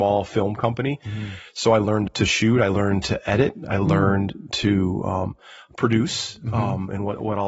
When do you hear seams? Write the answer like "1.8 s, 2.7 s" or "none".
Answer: none